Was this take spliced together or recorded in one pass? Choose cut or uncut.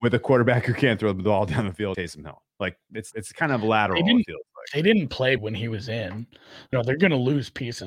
cut